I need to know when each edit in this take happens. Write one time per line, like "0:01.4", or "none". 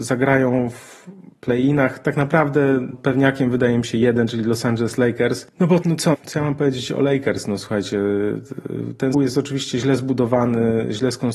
0:02.9
0:05.8
0:06.1
0:09.1